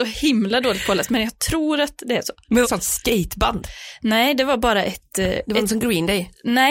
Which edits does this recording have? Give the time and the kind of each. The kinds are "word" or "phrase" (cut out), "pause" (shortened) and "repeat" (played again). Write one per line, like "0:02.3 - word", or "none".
0:02.6 - phrase